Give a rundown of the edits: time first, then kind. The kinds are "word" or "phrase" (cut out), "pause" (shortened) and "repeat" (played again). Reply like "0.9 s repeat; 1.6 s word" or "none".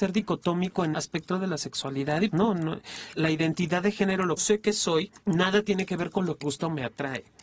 0.9 s word; 2.3 s word; 3.2 s word; 4.4 s phrase; 5.2 s pause; 6.4 s word